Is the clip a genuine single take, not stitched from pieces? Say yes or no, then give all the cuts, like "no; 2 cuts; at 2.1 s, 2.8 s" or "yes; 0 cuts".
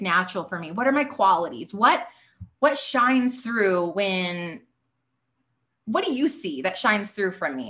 yes; 0 cuts